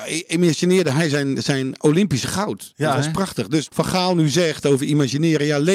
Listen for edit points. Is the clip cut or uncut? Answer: cut